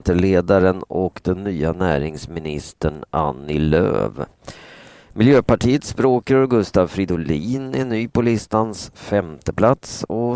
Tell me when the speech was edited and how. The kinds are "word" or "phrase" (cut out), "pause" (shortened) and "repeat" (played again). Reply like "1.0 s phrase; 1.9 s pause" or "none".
none